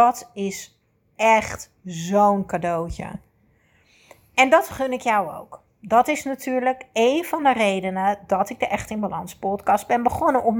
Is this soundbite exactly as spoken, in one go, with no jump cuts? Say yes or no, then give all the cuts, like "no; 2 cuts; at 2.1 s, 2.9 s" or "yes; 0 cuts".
yes; 0 cuts